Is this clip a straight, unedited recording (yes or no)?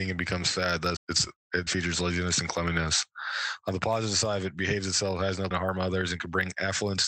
no